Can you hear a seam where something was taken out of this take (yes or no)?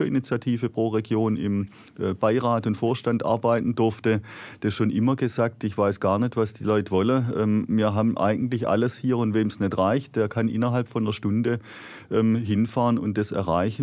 no